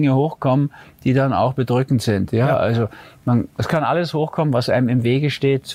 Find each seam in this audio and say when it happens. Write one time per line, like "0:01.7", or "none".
none